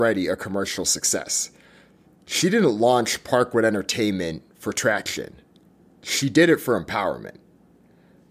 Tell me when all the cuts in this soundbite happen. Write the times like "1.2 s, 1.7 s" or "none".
none